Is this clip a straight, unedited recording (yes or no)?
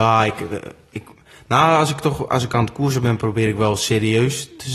yes